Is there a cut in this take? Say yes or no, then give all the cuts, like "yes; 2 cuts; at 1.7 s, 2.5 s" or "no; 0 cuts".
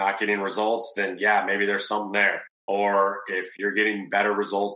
yes; 1 cut; at 2.5 s